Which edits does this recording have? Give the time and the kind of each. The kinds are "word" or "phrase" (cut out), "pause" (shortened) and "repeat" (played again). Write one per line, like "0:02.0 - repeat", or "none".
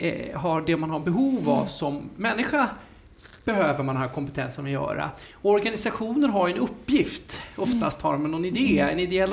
none